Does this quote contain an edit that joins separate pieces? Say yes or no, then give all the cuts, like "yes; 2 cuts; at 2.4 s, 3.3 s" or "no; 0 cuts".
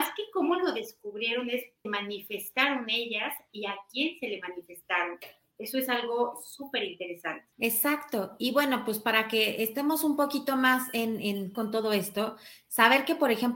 yes; 3 cuts; at 1.8 s, 7.5 s, 11.5 s